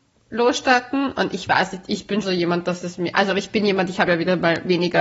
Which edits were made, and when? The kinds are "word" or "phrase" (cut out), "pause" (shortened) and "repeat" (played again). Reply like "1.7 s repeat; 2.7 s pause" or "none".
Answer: 2.2 s word